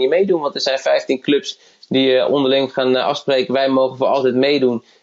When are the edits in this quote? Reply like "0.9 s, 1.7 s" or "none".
none